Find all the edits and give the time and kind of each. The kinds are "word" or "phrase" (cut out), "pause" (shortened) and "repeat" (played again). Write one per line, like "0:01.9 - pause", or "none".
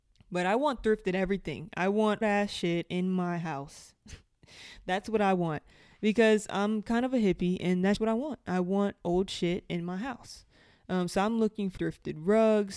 0:02.2 - word
0:08.0 - word
0:11.8 - word